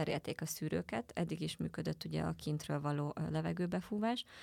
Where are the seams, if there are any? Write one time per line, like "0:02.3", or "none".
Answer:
none